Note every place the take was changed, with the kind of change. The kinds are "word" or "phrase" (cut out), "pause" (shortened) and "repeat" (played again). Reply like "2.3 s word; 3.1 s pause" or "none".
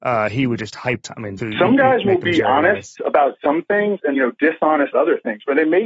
1.0 s phrase; 1.4 s phrase; 4.1 s word; 4.9 s word